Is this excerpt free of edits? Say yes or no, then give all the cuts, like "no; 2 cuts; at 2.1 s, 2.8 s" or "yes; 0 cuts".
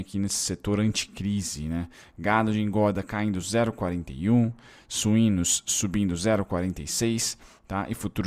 yes; 0 cuts